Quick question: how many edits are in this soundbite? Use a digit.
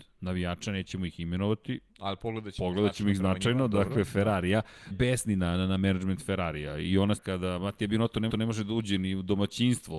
4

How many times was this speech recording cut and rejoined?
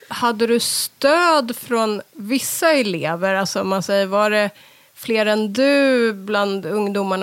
0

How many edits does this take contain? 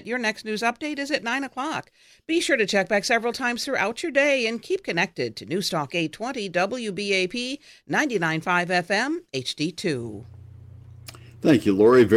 0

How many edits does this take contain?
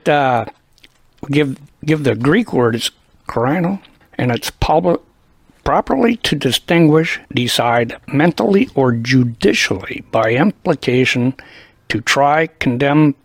3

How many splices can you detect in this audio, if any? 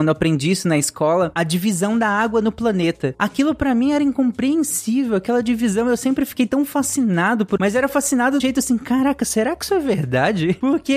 2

